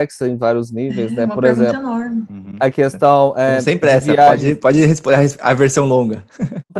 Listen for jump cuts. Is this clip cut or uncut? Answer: uncut